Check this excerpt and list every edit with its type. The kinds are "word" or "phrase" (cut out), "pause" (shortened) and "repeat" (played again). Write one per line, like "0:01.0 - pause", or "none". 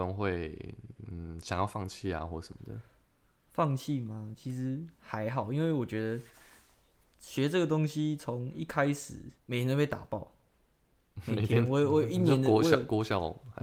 0:09.4 - pause